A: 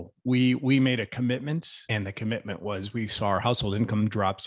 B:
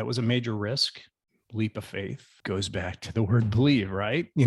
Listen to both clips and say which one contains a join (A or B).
A